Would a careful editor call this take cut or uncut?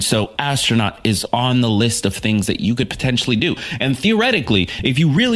uncut